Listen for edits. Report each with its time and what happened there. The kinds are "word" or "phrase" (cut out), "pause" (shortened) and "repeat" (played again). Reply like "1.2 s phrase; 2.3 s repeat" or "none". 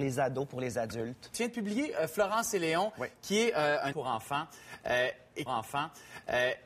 3.9 s word; 5.5 s repeat